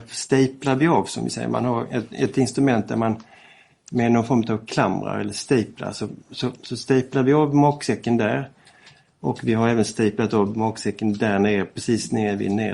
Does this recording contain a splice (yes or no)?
no